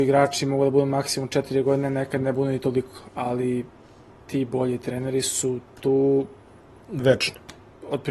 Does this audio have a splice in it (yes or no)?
no